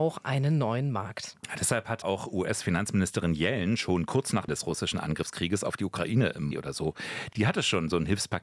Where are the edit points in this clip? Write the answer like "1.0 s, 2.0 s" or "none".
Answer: 2.0 s, 4.5 s, 6.5 s